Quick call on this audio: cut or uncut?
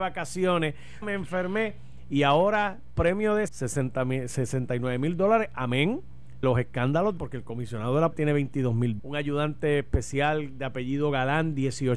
cut